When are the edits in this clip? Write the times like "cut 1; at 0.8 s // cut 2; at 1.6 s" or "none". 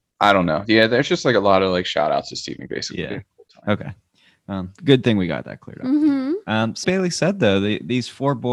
cut 1; at 2.7 s // cut 2; at 4.8 s // cut 3; at 6.8 s